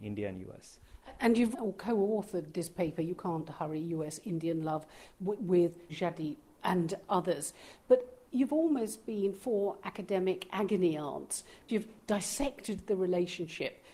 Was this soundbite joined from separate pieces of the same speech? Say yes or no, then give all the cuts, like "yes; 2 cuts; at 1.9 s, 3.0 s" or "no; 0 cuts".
yes; 4 cuts; at 1.5 s, 5.9 s, 6.6 s, 11.7 s